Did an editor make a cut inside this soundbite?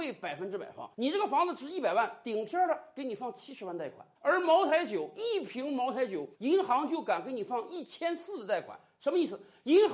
yes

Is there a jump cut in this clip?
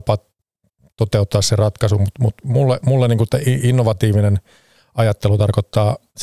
no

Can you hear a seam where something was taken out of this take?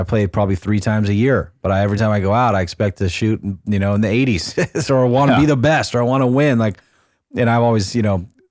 no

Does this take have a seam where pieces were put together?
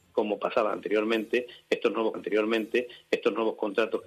yes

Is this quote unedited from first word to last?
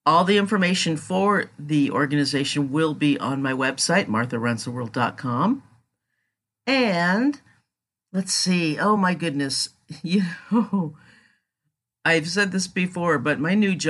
yes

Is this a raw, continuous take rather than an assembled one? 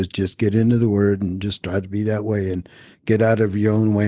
yes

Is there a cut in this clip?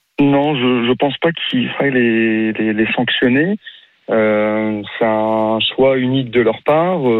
no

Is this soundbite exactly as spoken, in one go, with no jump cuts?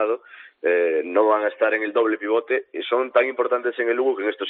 yes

